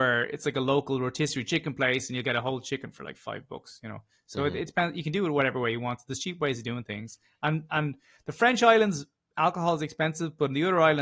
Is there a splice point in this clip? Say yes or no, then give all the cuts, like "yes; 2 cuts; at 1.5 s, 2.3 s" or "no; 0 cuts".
no; 0 cuts